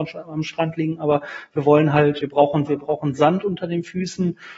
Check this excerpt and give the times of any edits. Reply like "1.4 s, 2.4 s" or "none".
2.2 s, 2.7 s